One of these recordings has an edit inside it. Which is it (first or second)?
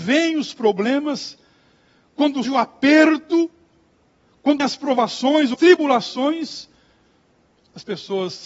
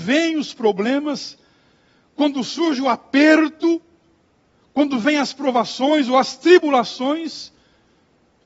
first